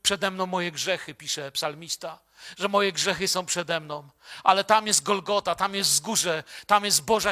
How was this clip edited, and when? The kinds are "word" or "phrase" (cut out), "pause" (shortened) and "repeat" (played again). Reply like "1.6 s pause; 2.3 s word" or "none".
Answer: none